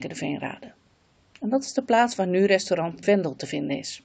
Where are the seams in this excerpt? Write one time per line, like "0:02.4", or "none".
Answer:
0:03.0